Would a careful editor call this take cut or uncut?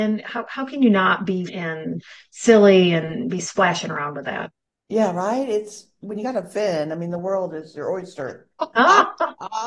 cut